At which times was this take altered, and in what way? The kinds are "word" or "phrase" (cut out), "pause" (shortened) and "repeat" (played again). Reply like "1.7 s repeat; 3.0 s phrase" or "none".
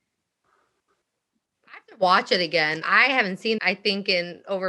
2.8 s word; 3.6 s phrase